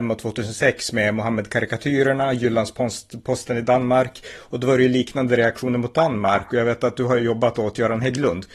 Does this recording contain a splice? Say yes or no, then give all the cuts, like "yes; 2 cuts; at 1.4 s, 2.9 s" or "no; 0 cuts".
no; 0 cuts